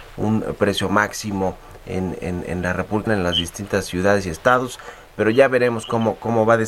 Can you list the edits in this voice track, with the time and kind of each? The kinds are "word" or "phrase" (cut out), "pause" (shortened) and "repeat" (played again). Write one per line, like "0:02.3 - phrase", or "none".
0:02.2 - word
0:03.1 - word

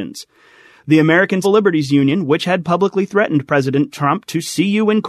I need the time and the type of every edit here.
0:01.4 - word

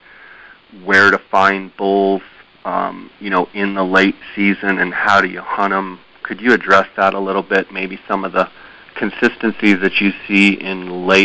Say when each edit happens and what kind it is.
0:08.7 - pause

